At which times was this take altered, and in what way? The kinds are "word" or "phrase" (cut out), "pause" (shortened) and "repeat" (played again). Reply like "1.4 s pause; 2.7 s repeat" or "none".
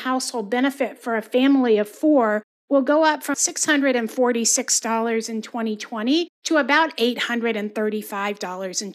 3.3 s word; 6.3 s pause